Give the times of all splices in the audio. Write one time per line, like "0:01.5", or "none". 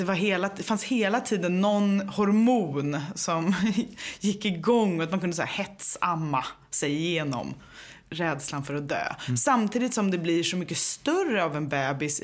0:08.0